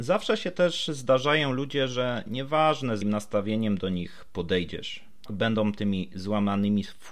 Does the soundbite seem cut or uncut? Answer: cut